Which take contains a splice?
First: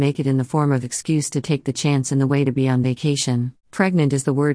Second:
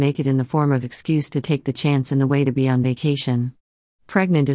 first; 1 cut; at 3.6 s

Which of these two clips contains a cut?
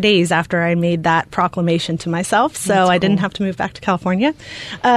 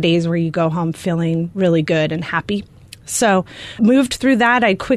second; 1 cut; at 3.8 s

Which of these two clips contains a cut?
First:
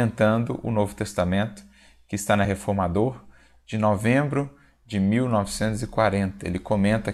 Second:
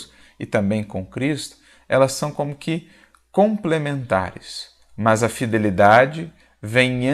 first; 1 cut; at 2.4 s

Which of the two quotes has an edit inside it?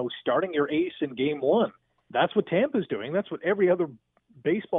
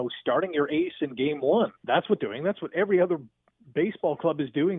second; 2 cuts; at 1.7 s, 2.2 s

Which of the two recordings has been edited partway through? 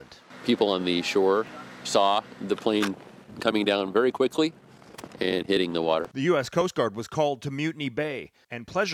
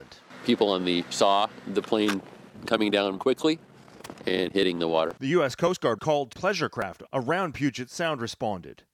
second; 5 cuts; at 1.0 s, 3.2 s, 6.0 s, 6.3 s, 7.1 s

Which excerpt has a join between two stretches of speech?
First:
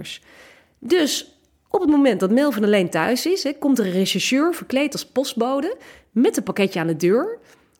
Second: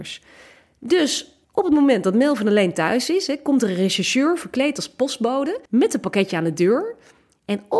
second; 2 cuts; at 1.4 s, 5.7 s

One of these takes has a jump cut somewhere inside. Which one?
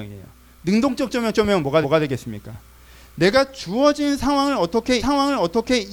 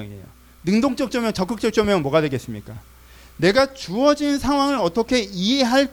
first; 3 cuts; at 1.3 s, 1.8 s, 5.0 s

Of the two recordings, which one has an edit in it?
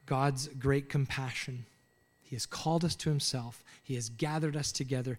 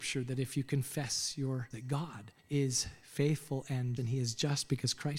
second; 3 cuts; at 1.7 s, 2.4 s, 4.0 s

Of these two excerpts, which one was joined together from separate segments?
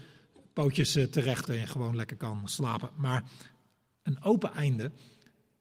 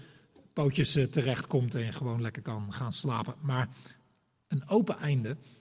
first; 2 cuts; at 1.5 s, 2.5 s

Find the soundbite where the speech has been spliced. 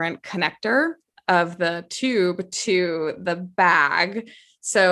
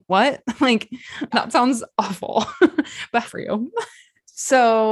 second; 2 cuts; at 1.3 s, 3.2 s

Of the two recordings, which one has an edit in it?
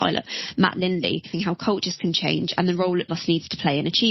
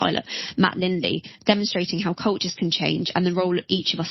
first; 2 cuts; at 1.3 s, 3.1 s

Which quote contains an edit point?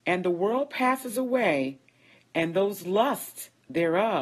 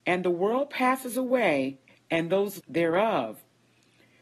second; 2 cuts; at 1.9 s, 2.6 s

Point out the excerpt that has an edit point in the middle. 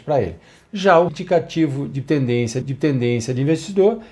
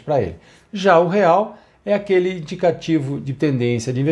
first; 2 cuts; at 1.1 s, 2.6 s

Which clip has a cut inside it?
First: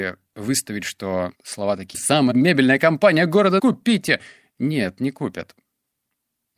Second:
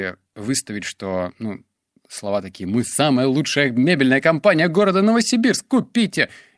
first; 4 cuts; at 1.3 s, 1.9 s, 2.3 s, 3.6 s

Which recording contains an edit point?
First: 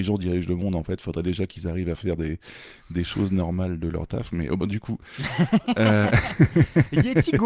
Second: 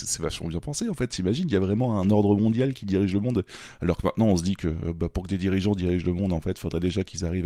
first; 1 cut; at 4.6 s

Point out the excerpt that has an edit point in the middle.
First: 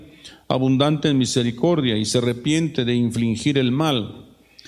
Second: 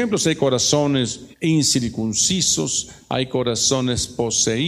second; 1 cut; at 1.3 s

